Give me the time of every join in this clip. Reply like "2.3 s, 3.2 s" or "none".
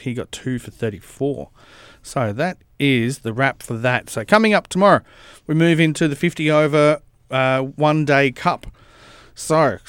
none